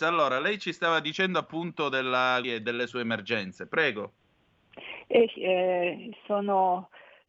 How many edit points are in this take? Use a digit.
2